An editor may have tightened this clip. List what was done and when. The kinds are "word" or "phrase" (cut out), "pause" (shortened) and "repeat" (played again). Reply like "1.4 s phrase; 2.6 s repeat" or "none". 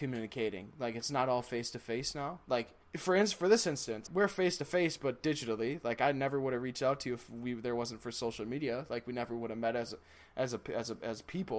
2.8 s pause; 4.1 s word